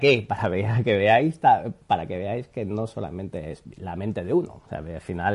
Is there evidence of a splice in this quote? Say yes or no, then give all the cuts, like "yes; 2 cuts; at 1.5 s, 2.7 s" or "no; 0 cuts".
no; 0 cuts